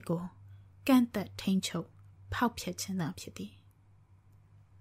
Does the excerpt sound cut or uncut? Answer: uncut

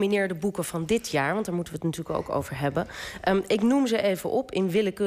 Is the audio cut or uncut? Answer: uncut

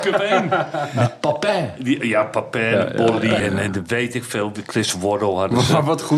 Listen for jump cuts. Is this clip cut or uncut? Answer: cut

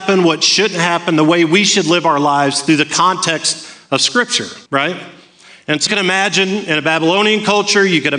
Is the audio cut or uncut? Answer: cut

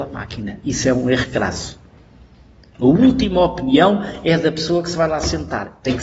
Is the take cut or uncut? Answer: uncut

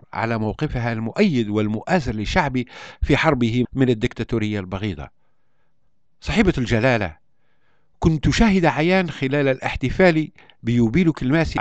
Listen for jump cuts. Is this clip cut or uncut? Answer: cut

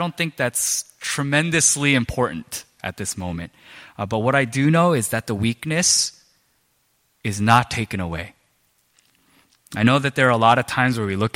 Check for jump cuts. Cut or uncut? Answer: uncut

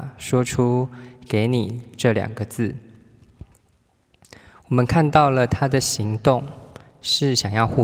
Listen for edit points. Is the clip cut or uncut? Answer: uncut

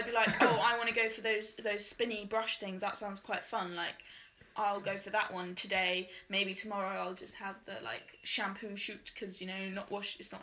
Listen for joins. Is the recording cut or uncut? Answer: uncut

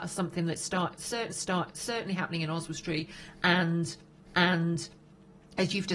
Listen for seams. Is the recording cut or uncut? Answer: cut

